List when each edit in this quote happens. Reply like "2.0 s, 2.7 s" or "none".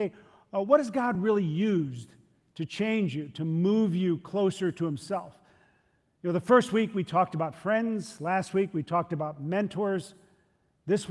none